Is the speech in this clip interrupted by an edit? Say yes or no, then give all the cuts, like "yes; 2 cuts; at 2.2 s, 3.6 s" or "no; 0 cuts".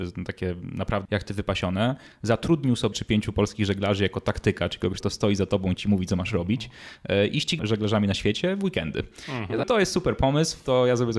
yes; 5 cuts; at 1.0 s, 2.9 s, 5.0 s, 7.6 s, 9.6 s